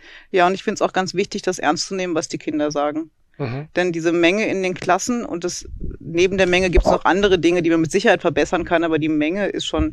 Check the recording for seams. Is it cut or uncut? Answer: uncut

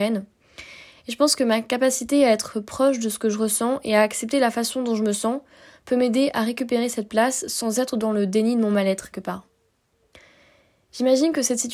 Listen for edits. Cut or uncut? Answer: cut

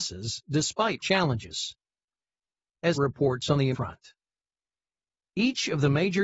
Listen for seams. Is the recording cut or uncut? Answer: cut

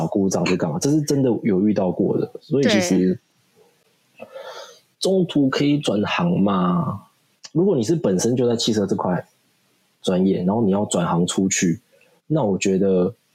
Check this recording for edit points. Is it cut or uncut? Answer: uncut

